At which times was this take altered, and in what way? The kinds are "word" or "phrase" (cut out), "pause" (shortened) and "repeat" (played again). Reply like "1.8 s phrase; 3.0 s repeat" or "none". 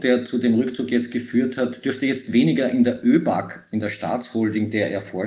none